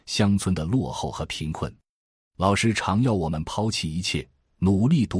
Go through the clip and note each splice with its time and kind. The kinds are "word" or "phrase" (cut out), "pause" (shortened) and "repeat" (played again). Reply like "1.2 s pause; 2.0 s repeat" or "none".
none